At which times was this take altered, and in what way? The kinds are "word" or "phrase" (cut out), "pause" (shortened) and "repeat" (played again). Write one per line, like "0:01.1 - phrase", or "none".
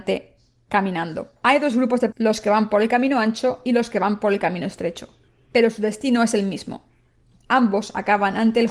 0:01.4 - pause
0:02.1 - word
0:05.3 - pause